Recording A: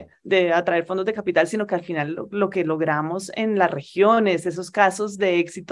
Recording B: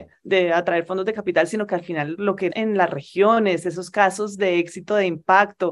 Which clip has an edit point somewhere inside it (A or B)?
B